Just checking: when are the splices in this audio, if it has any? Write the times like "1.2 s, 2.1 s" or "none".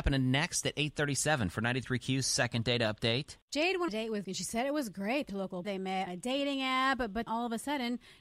3.9 s, 4.2 s, 5.3 s, 5.6 s, 6.1 s, 7.3 s